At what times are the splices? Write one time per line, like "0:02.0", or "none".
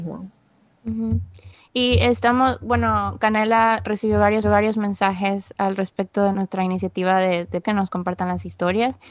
0:04.4
0:06.3
0:07.6